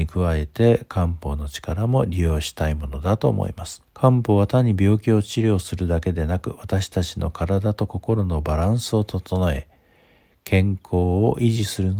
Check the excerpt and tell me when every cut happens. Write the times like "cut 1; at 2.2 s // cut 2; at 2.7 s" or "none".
cut 1; at 3.9 s